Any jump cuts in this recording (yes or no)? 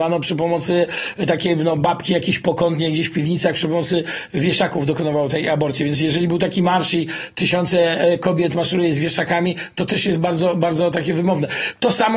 no